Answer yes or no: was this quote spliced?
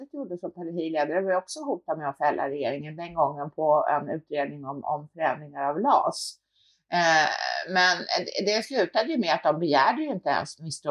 no